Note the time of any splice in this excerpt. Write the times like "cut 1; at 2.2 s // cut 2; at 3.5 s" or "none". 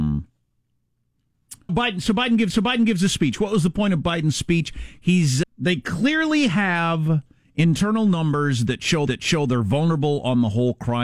cut 1; at 1.7 s // cut 2; at 2.5 s // cut 3; at 5.4 s // cut 4; at 9.1 s